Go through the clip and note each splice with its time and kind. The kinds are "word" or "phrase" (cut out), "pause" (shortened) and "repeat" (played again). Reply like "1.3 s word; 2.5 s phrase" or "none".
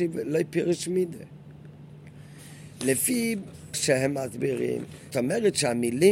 2.8 s word; 3.7 s word; 5.1 s word